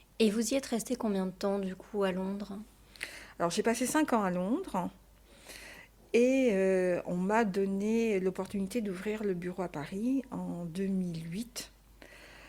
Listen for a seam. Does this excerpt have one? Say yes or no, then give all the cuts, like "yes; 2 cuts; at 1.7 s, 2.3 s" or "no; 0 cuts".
no; 0 cuts